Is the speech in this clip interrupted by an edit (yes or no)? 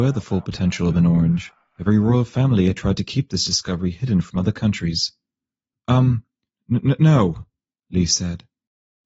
no